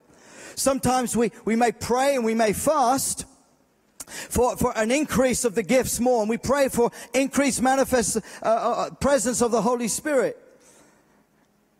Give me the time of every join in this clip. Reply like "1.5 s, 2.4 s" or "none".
none